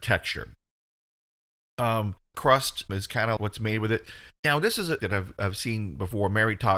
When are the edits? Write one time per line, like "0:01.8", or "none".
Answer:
0:02.3
0:02.9
0:03.4
0:04.4
0:05.0